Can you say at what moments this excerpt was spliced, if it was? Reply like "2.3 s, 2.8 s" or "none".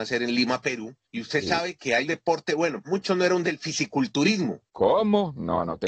1.0 s, 2.1 s, 2.8 s, 3.4 s, 4.7 s